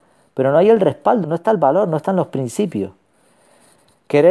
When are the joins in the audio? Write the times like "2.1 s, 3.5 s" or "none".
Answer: 1.2 s